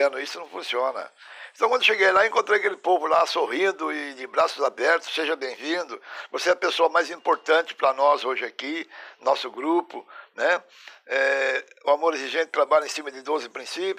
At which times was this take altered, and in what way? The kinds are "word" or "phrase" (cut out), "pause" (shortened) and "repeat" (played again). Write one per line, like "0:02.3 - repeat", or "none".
none